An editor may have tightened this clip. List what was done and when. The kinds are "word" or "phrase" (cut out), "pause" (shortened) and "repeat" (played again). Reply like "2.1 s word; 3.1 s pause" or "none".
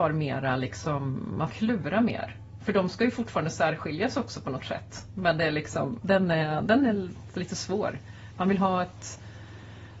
1.5 s word; 4.6 s word; 6.0 s word

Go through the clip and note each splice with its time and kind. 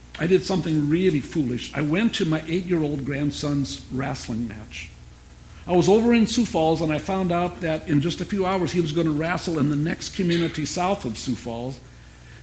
none

